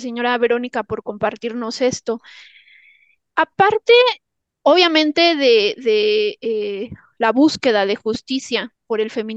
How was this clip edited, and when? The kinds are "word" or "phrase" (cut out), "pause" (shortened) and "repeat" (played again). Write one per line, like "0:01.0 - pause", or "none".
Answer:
none